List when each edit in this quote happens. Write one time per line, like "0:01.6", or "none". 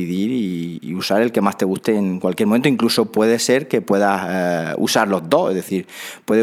none